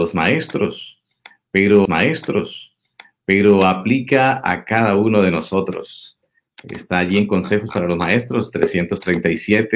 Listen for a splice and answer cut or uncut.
cut